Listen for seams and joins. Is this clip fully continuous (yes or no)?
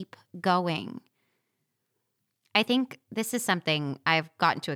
yes